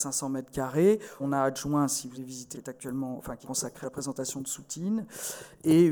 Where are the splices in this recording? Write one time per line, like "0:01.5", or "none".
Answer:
0:01.2
0:02.1
0:02.5
0:03.4
0:03.8

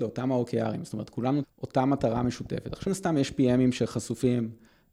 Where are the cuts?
0:01.4
0:02.9

